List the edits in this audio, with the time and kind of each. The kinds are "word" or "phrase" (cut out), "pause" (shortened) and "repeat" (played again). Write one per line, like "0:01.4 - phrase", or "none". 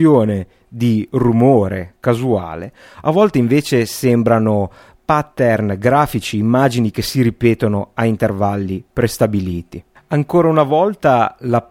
none